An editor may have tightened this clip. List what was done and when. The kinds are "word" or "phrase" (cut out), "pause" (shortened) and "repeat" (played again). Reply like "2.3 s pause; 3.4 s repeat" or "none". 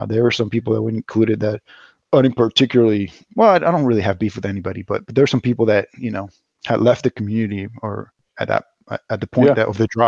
none